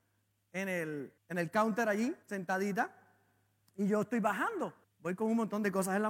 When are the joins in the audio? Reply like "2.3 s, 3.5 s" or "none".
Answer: 1.2 s, 2.2 s, 4.8 s